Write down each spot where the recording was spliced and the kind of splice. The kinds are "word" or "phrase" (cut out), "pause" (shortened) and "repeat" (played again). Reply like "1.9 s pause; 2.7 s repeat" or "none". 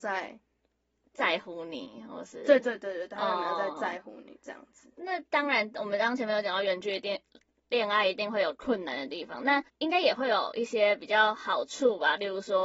9.7 s pause